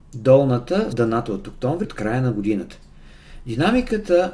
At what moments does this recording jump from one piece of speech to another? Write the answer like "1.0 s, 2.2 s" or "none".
0.9 s, 1.8 s

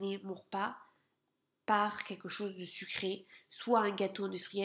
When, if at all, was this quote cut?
none

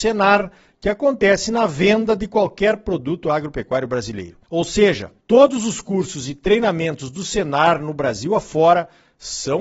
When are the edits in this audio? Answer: 4.4 s, 5.2 s

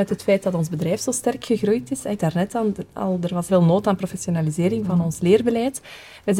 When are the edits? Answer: 2.2 s, 3.5 s

